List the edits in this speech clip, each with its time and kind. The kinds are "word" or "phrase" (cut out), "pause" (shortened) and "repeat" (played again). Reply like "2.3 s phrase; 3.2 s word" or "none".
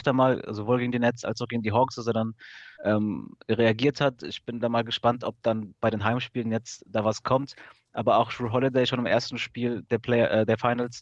2.7 s pause